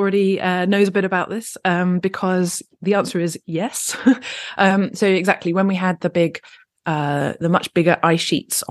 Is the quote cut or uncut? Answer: uncut